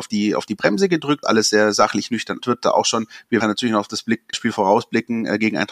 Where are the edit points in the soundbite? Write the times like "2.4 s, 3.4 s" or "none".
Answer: 1.2 s, 2.4 s, 3.4 s, 4.3 s